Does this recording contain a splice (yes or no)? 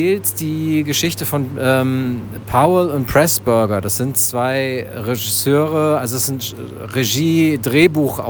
no